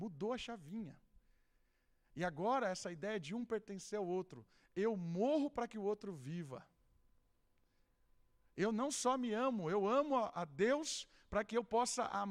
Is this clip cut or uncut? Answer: uncut